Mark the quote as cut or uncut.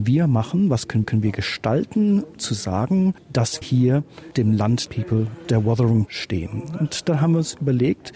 cut